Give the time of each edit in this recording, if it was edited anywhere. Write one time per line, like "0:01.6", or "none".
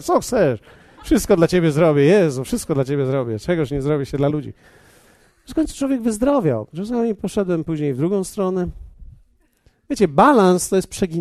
none